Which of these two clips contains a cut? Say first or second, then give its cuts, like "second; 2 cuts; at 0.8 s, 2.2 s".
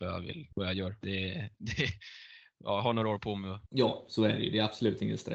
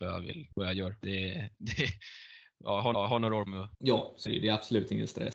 second; 3 cuts; at 2.9 s, 3.5 s, 4.3 s